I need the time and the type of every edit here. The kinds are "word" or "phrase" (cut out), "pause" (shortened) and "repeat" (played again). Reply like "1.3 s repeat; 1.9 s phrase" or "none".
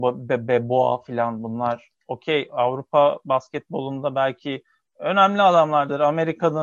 none